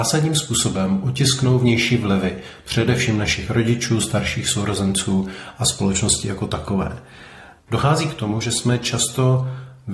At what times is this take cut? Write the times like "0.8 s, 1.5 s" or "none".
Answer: none